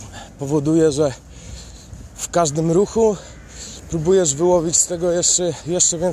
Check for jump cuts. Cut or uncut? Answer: uncut